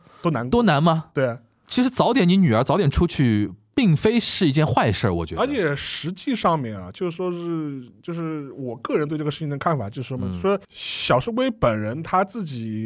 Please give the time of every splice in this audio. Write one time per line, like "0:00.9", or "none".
0:10.6